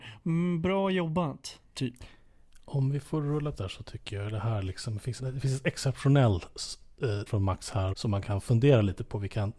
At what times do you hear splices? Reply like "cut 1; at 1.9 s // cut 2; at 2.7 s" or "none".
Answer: cut 1; at 3.5 s // cut 2; at 5.2 s // cut 3; at 7.3 s // cut 4; at 7.9 s